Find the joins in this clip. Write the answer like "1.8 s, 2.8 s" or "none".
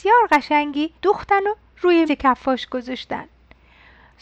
1.0 s, 2.1 s